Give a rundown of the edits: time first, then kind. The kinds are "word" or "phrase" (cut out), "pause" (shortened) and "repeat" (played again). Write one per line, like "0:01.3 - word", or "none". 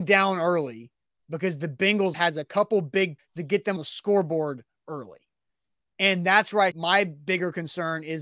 0:02.1 - word
0:03.2 - word
0:03.8 - word
0:06.7 - word